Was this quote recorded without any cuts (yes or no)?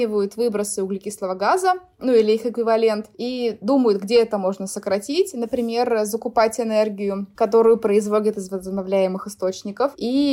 yes